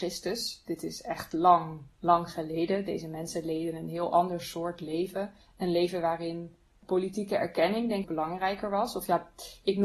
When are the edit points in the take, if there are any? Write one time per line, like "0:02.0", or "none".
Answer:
0:08.0